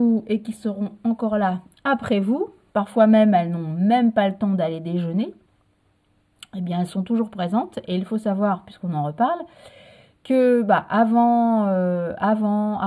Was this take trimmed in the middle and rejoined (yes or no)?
no